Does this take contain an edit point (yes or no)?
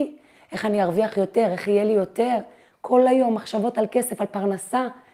no